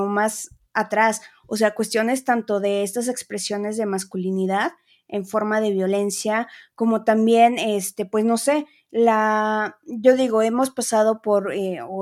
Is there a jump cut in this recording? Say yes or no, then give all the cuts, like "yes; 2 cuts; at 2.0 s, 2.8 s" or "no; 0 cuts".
no; 0 cuts